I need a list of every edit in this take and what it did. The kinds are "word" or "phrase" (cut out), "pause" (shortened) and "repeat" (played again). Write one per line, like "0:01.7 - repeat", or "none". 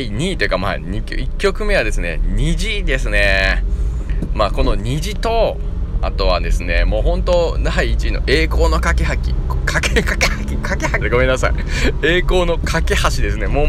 0:11.0 - word